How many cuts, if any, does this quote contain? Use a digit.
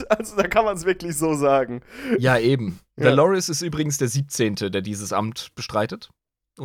0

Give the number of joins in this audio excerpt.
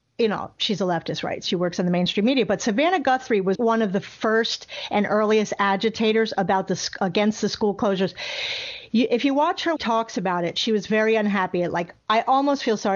2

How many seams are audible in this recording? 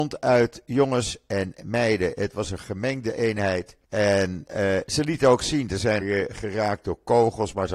2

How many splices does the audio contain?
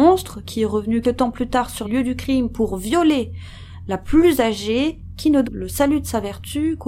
3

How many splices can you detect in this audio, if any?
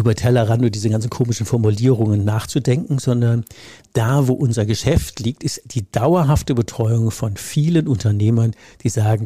0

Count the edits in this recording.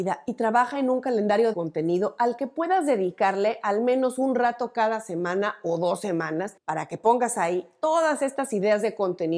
1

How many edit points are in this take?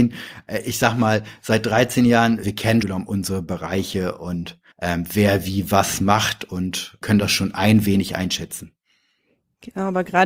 4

